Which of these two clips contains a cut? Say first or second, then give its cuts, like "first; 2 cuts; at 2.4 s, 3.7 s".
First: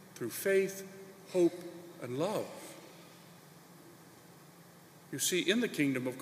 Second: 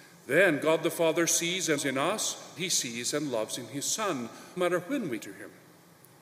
second; 4 cuts; at 1.8 s, 2.6 s, 4.6 s, 5.2 s